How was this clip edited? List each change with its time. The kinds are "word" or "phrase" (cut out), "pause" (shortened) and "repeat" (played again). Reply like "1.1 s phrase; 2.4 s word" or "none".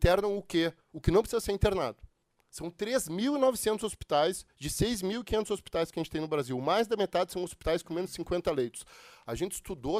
2.2 s pause